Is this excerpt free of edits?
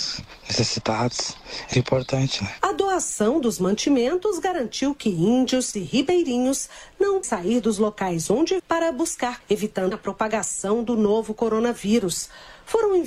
no; 6 cuts; at 1.7 s, 5.7 s, 7.2 s, 8.6 s, 9.4 s, 9.9 s

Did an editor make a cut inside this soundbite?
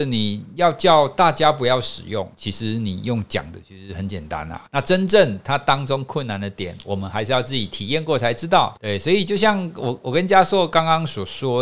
yes; 3 cuts; at 2.3 s, 4.7 s, 8.8 s

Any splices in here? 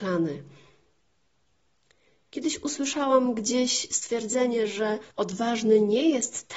yes; 1 cut; at 5.1 s

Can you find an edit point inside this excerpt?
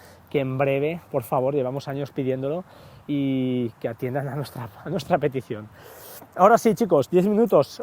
no; 0 cuts

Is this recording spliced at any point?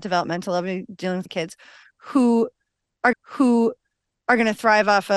yes; 2 cuts; at 1.3 s, 3.1 s

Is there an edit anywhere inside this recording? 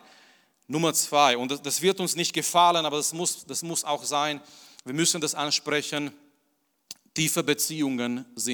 no; 0 cuts

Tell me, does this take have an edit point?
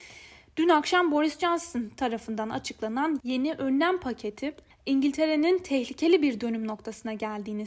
no; 0 cuts

